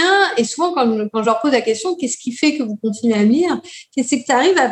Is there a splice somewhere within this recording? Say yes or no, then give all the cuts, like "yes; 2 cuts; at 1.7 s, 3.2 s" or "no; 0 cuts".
no; 0 cuts